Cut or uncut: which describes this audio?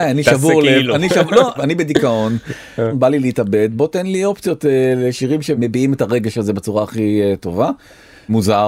uncut